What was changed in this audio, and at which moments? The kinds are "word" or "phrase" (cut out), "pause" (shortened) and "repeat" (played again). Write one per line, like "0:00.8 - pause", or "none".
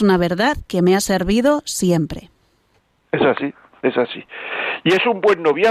none